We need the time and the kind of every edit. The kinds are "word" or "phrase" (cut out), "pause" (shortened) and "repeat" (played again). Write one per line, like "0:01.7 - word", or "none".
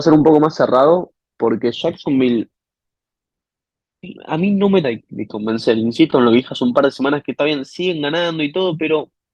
0:04.2 - pause
0:04.8 - word